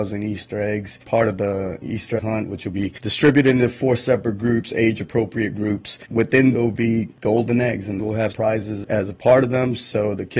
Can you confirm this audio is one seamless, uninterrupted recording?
no; 5 cuts; at 1.0 s, 2.2 s, 6.5 s, 8.0 s, 8.3 s

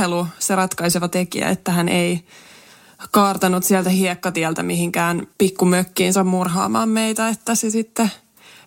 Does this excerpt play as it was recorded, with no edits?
no; 1 cut; at 5.3 s

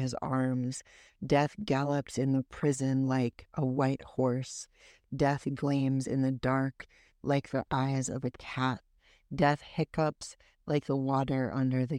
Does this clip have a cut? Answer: no; 0 cuts

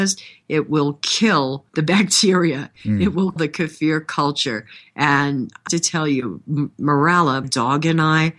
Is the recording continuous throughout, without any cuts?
no; 4 cuts; at 1.7 s, 3.4 s, 5.7 s, 7.4 s

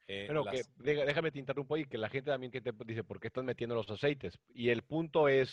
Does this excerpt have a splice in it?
yes; 1 cut; at 2.5 s

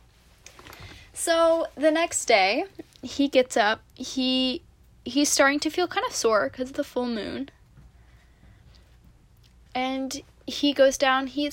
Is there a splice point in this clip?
no; 0 cuts

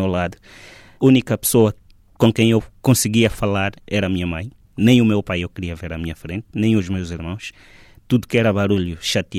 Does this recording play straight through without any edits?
yes; 0 cuts

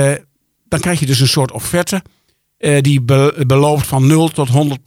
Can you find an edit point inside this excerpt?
no; 0 cuts

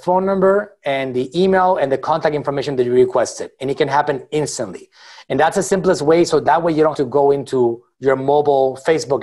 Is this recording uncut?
no; 1 cut; at 6.9 s

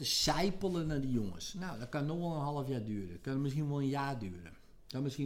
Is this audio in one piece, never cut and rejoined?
yes; 0 cuts

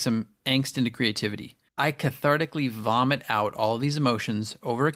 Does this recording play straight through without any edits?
no; 1 cut; at 1.7 s

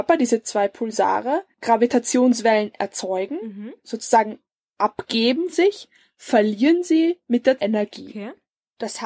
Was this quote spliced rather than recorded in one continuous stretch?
yes; 2 cuts; at 5.5 s, 7.6 s

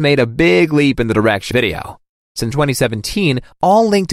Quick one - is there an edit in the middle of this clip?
yes; 2 cuts; at 1.5 s, 2.5 s

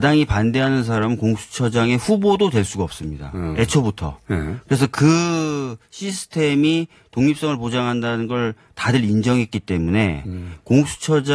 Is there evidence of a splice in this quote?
no; 0 cuts

